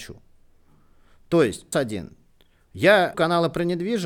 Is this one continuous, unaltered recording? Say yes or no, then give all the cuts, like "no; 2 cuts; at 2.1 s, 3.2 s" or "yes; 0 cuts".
no; 2 cuts; at 1.7 s, 3.1 s